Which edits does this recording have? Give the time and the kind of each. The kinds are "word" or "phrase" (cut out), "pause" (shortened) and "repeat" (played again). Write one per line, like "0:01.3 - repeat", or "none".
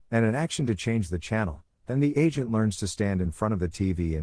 none